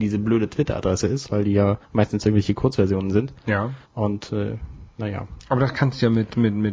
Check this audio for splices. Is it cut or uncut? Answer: cut